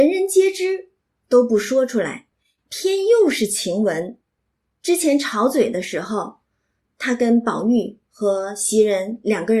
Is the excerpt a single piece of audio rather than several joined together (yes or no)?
yes